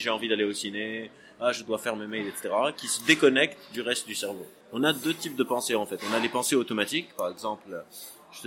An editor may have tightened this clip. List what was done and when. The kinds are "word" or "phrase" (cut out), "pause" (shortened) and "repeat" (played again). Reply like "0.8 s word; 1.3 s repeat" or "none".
4.6 s pause